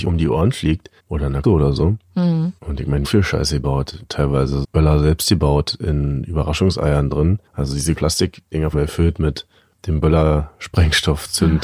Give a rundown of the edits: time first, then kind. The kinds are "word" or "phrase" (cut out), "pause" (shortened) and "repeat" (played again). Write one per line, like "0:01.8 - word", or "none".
0:01.0 - pause
0:01.4 - word
0:02.6 - pause
0:03.0 - phrase
0:04.6 - word
0:07.5 - pause
0:07.9 - phrase
0:08.7 - phrase